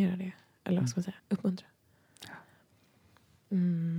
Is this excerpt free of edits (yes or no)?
no